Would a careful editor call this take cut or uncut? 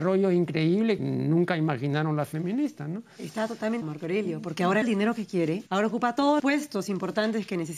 cut